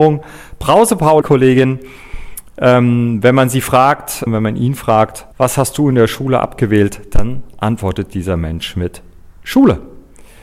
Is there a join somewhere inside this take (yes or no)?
yes